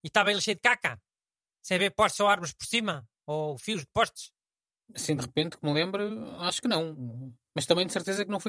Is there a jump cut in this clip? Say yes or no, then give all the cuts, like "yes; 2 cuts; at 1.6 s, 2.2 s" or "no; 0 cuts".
no; 0 cuts